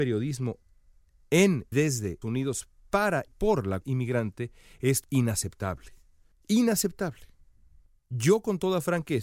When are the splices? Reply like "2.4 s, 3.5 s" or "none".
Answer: 1.7 s, 2.2 s, 3.3 s, 3.8 s, 5.0 s